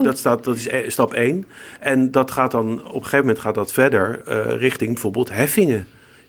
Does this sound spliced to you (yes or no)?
no